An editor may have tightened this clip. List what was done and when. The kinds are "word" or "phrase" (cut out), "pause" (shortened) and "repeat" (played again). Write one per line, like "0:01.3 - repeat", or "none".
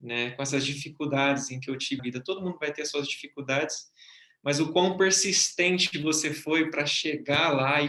0:02.0 - word